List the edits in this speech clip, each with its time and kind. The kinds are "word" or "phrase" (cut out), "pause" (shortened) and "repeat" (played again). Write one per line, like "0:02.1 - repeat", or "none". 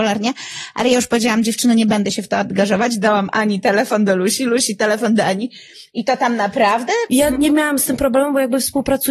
none